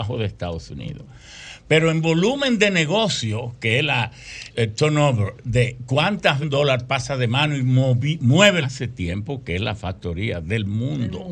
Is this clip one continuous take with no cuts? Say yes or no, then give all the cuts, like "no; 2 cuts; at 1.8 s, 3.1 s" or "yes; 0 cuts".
no; 3 cuts; at 4.5 s, 6.4 s, 8.6 s